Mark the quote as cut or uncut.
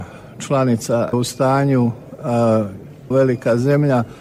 cut